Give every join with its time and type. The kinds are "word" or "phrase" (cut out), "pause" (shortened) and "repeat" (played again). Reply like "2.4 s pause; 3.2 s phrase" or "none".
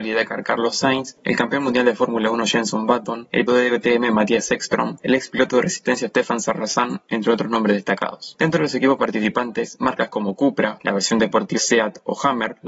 3.5 s word; 11.6 s word